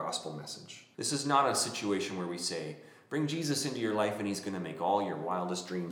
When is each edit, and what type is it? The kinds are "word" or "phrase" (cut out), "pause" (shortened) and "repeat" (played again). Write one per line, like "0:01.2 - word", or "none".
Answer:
0:00.9 - pause